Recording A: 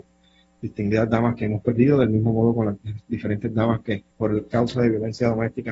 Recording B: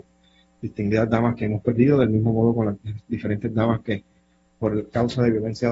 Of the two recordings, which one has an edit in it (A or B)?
A